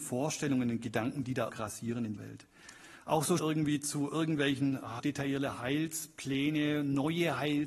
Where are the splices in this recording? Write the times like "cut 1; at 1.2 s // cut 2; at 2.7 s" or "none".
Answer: cut 1; at 1.5 s // cut 2; at 2.2 s // cut 3; at 3.4 s // cut 4; at 5.0 s